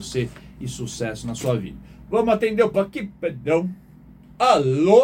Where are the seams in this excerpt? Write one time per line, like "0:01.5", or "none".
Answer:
0:02.7